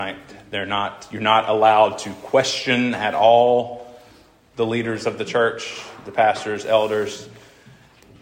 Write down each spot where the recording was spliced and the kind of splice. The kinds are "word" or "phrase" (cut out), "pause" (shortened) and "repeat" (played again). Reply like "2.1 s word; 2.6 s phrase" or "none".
none